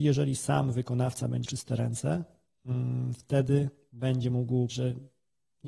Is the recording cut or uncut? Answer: cut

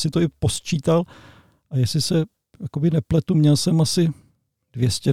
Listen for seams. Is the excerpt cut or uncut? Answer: uncut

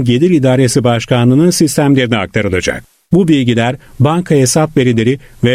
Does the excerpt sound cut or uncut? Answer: uncut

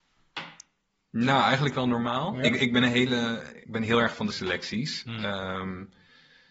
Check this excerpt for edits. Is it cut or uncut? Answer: cut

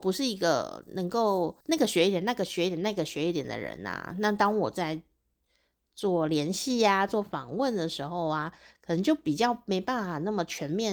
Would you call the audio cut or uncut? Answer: cut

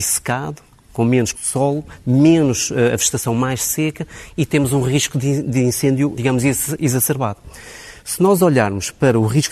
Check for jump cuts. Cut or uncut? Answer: cut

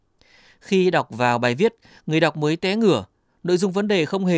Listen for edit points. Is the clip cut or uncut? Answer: uncut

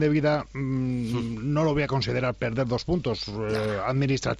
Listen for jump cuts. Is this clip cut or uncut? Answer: uncut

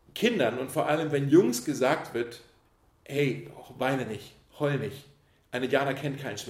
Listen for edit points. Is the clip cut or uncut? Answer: uncut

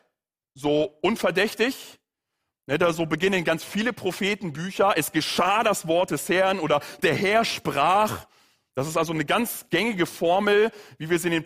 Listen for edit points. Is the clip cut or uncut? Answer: uncut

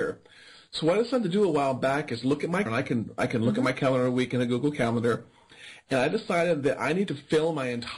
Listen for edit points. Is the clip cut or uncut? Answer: cut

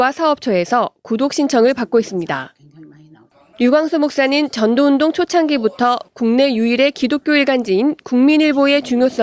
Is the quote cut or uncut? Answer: uncut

